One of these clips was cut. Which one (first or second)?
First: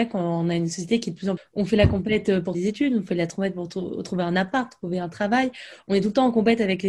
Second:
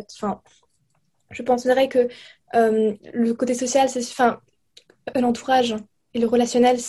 first